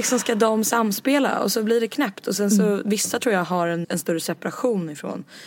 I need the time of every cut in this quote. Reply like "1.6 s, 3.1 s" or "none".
3.8 s